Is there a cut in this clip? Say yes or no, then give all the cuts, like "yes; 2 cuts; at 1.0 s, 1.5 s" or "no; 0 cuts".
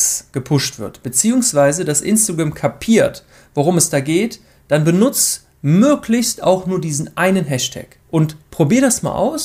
yes; 1 cut; at 8.0 s